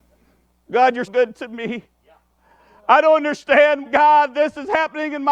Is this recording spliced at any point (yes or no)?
yes